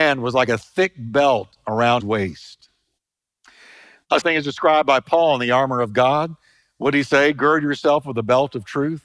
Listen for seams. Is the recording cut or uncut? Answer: cut